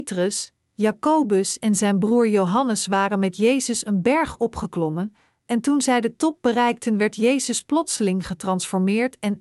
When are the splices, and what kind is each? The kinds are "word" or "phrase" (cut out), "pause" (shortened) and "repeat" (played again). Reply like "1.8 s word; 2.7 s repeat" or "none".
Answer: none